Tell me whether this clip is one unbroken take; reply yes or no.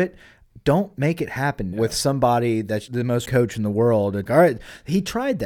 no